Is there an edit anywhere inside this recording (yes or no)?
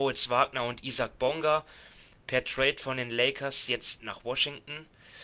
no